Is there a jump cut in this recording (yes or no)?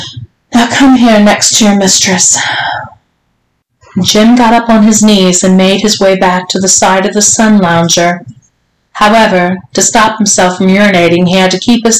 no